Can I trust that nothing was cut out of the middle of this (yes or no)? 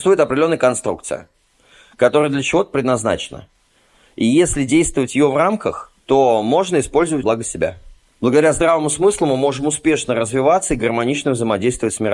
no